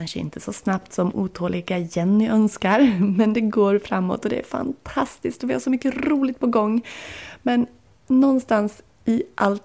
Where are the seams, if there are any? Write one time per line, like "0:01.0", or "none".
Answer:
none